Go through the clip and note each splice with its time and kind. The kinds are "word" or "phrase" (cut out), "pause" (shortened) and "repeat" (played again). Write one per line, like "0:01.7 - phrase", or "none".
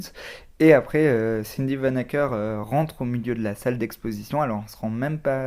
none